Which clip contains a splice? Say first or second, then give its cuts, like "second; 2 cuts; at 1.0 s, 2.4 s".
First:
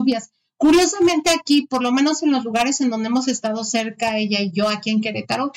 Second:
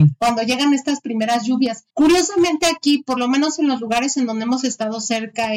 second; 1 cut; at 1.9 s